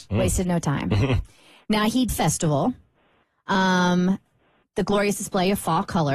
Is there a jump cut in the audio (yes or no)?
yes